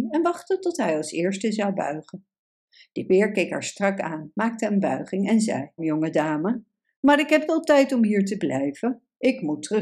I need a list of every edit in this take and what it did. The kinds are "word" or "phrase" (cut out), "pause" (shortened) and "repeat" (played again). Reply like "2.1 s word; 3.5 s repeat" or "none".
5.8 s word; 7.5 s word